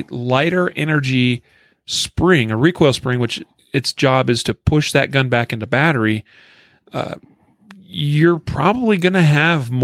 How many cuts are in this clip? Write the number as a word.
zero